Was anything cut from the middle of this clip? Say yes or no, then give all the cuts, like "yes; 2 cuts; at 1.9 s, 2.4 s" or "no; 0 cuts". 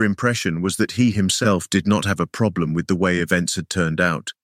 no; 0 cuts